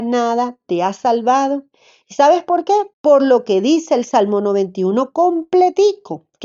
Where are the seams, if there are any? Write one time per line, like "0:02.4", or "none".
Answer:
0:02.9